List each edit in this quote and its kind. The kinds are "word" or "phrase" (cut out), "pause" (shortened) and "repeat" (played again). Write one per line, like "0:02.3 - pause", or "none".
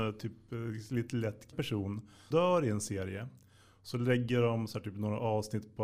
0:01.5 - word
0:02.3 - word